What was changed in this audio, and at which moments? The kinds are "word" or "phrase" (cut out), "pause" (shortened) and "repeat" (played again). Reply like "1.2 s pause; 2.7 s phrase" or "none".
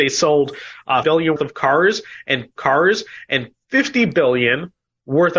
1.0 s word; 1.4 s word; 2.6 s repeat

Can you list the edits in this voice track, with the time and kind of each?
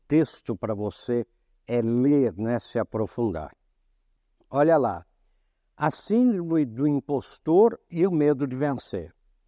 none

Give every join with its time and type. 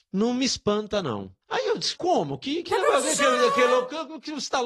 1.4 s pause; 2.0 s word

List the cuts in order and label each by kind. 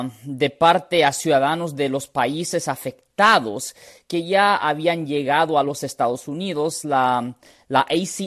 none

